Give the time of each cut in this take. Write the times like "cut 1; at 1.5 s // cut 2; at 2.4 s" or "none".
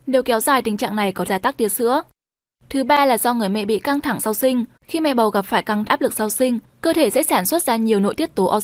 cut 1; at 1.3 s // cut 2; at 4.8 s // cut 3; at 5.9 s